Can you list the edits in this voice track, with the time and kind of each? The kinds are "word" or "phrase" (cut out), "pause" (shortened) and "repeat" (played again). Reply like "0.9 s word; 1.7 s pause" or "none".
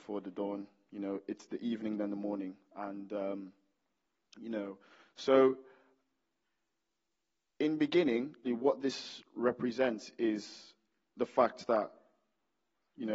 8.4 s word